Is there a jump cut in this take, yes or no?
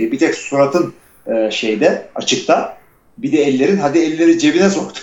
no